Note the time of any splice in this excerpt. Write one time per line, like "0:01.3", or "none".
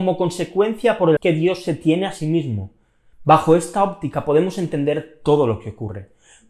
0:01.2